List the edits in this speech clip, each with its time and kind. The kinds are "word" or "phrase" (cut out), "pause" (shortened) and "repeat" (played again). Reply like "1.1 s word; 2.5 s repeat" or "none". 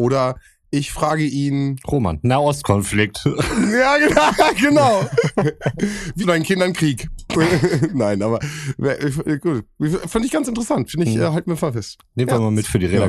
6.2 s word; 7.3 s word